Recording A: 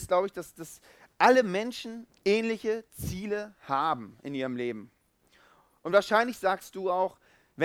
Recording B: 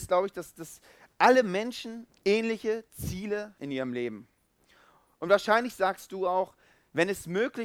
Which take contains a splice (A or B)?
B